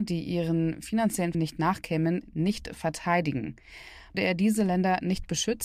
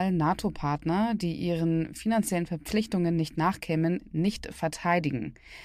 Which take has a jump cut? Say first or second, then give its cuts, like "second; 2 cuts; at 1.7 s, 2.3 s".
first; 2 cuts; at 1.3 s, 4.1 s